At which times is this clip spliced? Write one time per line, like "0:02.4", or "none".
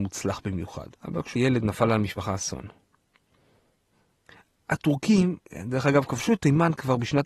0:00.9
0:01.4
0:05.4